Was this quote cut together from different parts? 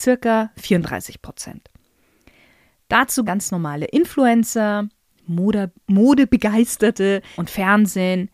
yes; 2 cuts; at 3.3 s, 7.4 s

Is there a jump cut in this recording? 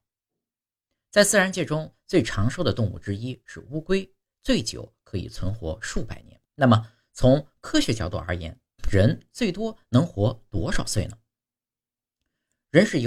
yes; 1 cut; at 6.4 s

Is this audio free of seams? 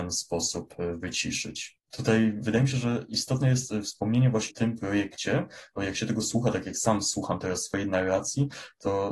no; 1 cut; at 4.5 s

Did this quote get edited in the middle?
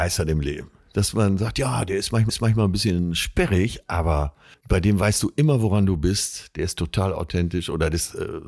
yes; 2 cuts; at 2.3 s, 4.5 s

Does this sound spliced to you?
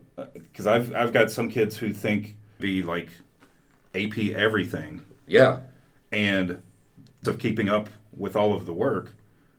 yes; 2 cuts; at 2.6 s, 7.2 s

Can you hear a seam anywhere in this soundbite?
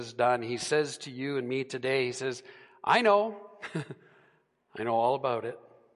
no; 0 cuts

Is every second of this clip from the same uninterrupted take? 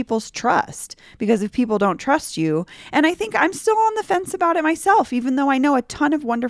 yes; 0 cuts

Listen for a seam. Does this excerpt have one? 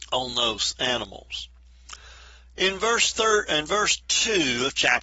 no; 0 cuts

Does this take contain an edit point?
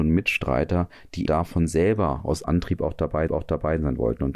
yes; 3 cuts; at 1.3 s, 2.4 s, 3.3 s

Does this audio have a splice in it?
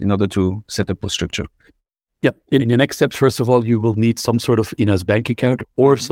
yes; 2 cuts; at 1.0 s, 2.6 s

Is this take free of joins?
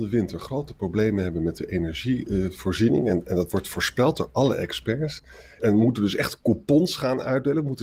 no; 1 cut; at 5.6 s

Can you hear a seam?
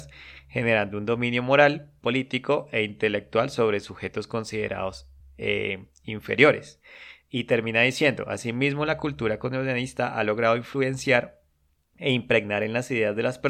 no; 0 cuts

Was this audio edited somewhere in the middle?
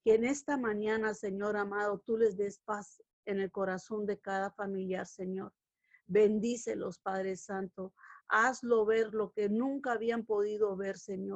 no; 0 cuts

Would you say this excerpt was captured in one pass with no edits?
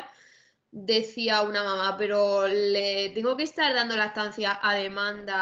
yes; 0 cuts

